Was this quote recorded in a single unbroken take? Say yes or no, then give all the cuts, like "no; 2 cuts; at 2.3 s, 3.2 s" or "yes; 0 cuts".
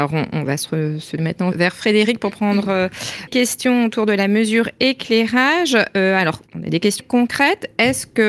no; 5 cuts; at 1.2 s, 1.5 s, 3.3 s, 6.5 s, 7.0 s